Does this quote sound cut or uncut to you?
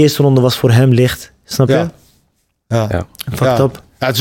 uncut